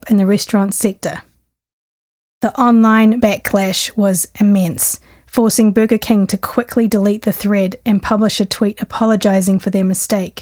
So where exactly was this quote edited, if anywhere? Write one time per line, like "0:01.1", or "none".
none